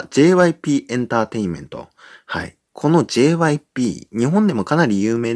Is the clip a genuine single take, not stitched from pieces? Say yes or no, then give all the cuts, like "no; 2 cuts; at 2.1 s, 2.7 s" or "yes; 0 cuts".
yes; 0 cuts